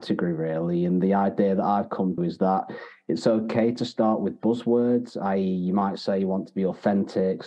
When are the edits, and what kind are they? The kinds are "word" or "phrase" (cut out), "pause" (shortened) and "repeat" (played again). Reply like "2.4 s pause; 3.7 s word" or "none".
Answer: 2.2 s word

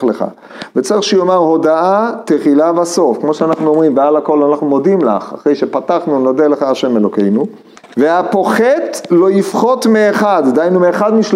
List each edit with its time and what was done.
none

